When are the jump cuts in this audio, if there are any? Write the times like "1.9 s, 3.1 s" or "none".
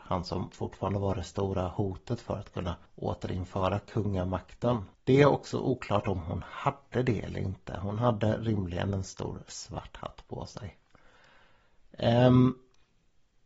2.9 s, 4.9 s